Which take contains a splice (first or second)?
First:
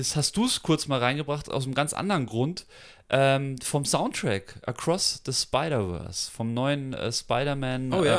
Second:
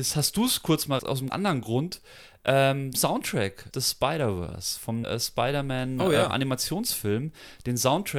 second